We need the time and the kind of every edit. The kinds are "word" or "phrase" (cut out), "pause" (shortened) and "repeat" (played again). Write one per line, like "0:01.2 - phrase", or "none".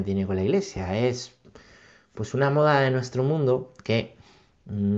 none